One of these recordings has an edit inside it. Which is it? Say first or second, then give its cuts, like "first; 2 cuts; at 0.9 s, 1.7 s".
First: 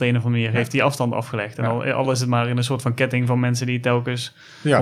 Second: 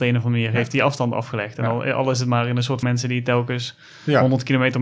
second; 1 cut; at 2.8 s